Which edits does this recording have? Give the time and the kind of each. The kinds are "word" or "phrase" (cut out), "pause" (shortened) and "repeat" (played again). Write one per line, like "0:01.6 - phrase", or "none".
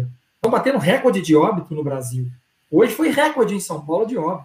none